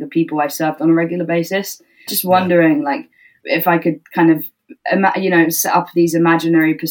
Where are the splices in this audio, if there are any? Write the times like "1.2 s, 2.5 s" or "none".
2.1 s